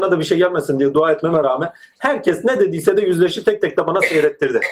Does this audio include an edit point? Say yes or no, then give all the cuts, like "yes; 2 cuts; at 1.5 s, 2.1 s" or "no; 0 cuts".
no; 0 cuts